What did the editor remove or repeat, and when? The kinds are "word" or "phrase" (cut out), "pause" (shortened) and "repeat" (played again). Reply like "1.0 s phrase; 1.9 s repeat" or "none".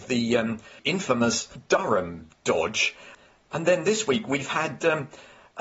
none